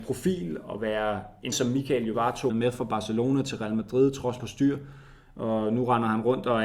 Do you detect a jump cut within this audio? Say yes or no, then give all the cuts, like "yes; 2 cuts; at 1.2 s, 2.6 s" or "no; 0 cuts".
yes; 4 cuts; at 1.5 s, 2.1 s, 2.5 s, 4.4 s